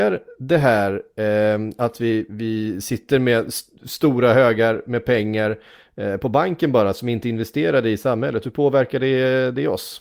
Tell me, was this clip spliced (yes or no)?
no